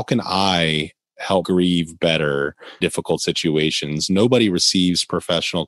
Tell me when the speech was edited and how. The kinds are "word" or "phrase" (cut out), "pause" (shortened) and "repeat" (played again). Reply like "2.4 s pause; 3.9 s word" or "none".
1.4 s phrase; 2.8 s word

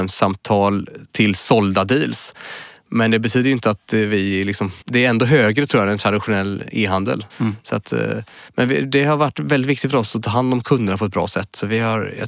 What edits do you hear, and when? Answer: 4.8 s pause; 7.3 s pause; 8.5 s pause

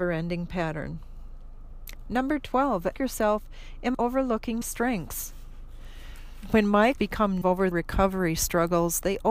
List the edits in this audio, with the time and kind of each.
2.9 s word; 3.9 s word; 4.6 s word; 7.0 s word; 7.4 s word; 7.7 s word

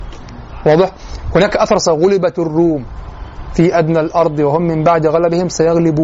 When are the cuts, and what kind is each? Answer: none

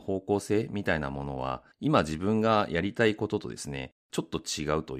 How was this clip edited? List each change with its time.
1.7 s pause; 4.0 s pause

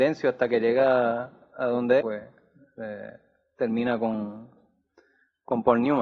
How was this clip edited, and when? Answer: 2.0 s phrase

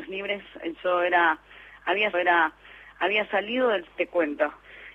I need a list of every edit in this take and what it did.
2.1 s repeat; 3.9 s word

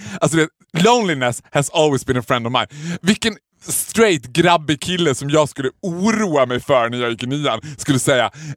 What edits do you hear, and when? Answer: none

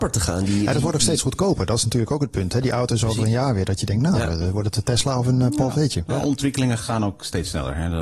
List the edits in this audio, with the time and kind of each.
none

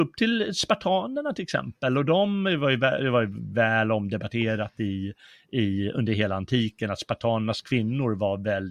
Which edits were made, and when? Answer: none

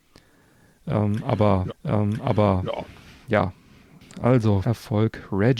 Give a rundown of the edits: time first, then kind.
1.7 s repeat; 4.6 s word

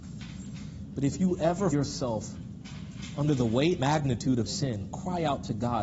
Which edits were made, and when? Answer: 1.7 s word; 3.8 s word; 4.5 s word

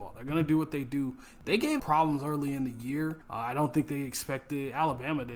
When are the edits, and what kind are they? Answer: 1.8 s word; 3.2 s pause

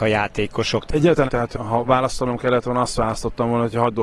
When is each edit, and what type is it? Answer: 1.3 s phrase

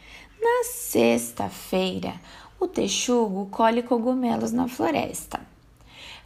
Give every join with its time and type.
none

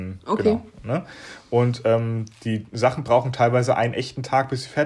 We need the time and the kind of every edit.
none

